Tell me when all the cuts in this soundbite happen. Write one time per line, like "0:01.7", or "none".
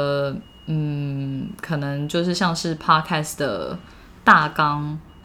none